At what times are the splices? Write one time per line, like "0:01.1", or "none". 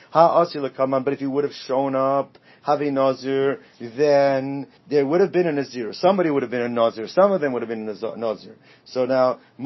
0:04.8